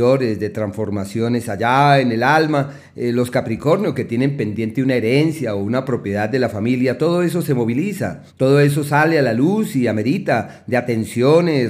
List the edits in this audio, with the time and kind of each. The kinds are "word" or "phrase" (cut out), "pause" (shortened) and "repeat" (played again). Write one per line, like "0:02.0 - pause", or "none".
0:08.3 - pause